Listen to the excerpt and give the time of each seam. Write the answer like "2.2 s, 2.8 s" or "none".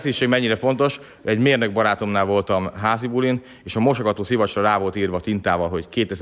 none